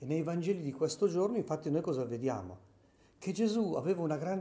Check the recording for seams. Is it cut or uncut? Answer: uncut